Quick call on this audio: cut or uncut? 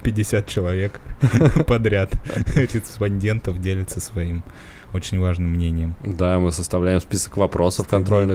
uncut